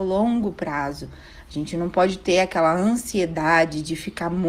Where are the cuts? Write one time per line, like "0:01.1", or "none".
none